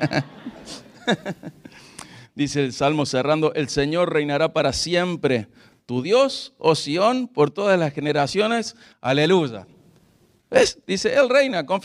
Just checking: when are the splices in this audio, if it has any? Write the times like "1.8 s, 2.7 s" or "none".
none